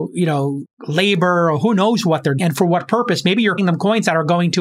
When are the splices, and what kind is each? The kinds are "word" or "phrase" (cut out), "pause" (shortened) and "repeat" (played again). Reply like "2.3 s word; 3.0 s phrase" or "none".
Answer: 2.4 s word; 3.6 s word